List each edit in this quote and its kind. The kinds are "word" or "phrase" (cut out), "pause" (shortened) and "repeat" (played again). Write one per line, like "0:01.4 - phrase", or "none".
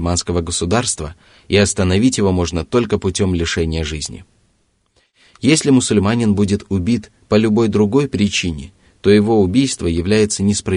none

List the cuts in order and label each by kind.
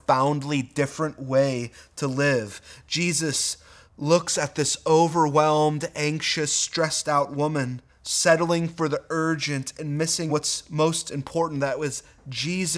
0:03.9 - pause
0:07.9 - pause
0:10.3 - phrase

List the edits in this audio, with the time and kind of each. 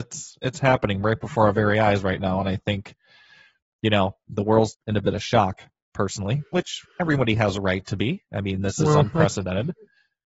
0:04.7 - word

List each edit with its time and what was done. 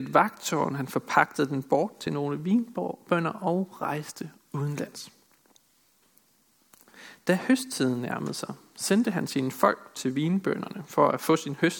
none

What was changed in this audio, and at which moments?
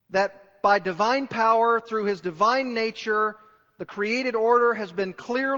none

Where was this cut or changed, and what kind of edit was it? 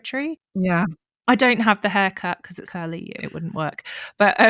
0:02.6 - word
0:03.2 - word

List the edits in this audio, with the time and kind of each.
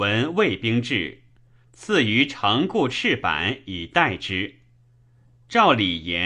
none

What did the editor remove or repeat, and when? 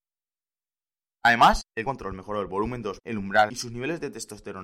0:01.9 - word
0:03.0 - word
0:03.5 - word

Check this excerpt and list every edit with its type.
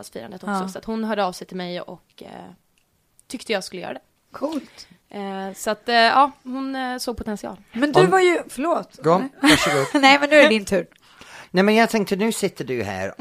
none

